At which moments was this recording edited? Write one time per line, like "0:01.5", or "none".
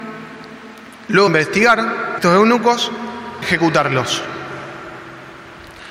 0:01.3
0:02.2
0:03.4